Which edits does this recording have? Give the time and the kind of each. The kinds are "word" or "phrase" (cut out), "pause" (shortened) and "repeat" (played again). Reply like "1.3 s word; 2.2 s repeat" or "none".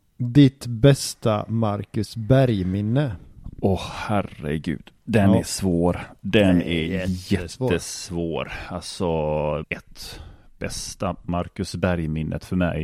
5.0 s pause; 9.6 s phrase; 11.3 s word